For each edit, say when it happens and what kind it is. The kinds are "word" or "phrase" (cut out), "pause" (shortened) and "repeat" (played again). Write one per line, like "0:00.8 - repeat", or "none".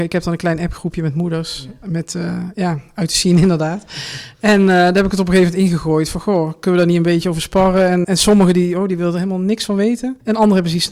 0:08.0 - word